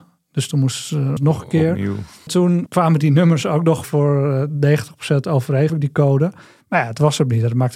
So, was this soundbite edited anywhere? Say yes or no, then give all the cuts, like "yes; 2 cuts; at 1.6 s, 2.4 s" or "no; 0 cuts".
yes; 5 cuts; at 1.2 s, 2.3 s, 2.7 s, 3.8 s, 5.7 s